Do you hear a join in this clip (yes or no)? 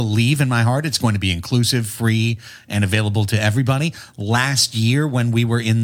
no